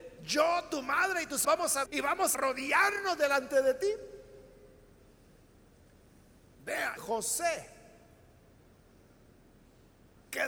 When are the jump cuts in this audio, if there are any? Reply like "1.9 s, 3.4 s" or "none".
1.4 s, 1.9 s, 2.3 s, 7.0 s

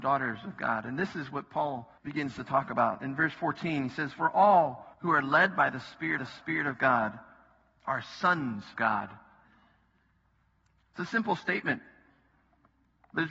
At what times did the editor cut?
2.0 s, 4.9 s, 6.2 s, 8.8 s

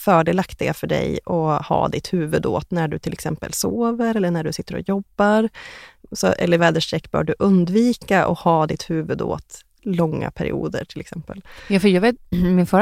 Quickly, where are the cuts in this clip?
6.6 s

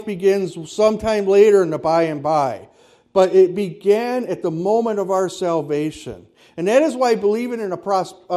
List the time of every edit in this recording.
none

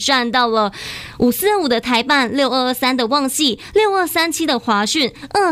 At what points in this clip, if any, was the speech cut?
none

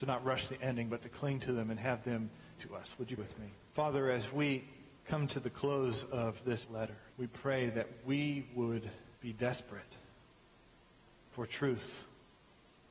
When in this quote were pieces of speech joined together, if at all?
2.6 s, 3.2 s, 3.7 s, 5.0 s, 6.6 s, 7.1 s, 9.2 s

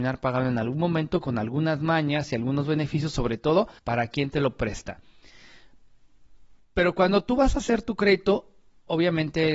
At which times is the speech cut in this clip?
3.8 s

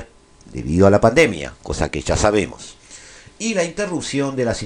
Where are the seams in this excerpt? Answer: none

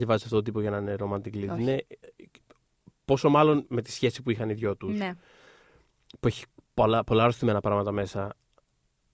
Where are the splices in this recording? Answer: none

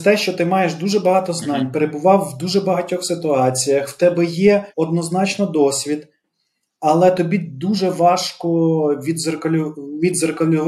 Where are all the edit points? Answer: 4.7 s

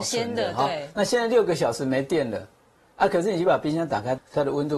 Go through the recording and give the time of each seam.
none

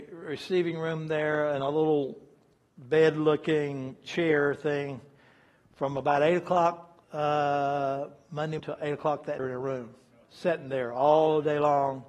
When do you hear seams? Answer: 7.0 s, 8.6 s, 9.4 s, 10.2 s

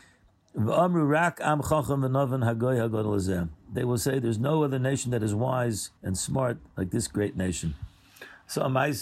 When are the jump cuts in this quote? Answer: 6.0 s, 6.7 s

